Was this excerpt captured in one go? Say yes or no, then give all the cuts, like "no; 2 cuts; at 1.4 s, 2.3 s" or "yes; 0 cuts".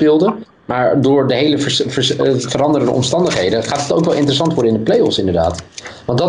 yes; 0 cuts